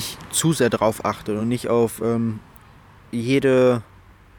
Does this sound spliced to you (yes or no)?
no